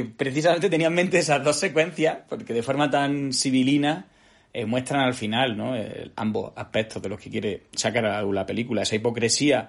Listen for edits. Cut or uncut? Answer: uncut